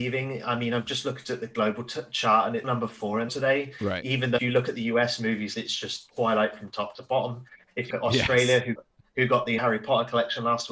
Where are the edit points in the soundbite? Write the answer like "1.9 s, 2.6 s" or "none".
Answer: 2.6 s, 3.3 s, 4.4 s, 5.5 s, 7.9 s, 8.8 s, 9.6 s